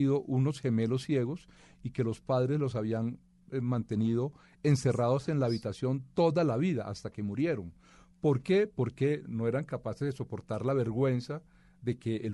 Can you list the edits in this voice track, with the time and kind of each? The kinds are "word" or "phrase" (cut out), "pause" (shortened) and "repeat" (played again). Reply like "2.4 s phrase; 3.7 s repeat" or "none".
none